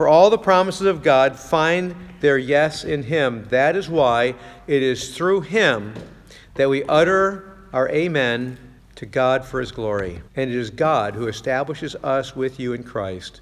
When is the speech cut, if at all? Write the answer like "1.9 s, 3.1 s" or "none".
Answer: 8.8 s, 10.3 s